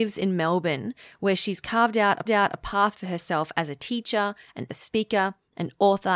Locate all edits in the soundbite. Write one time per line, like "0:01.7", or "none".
0:02.3
0:04.7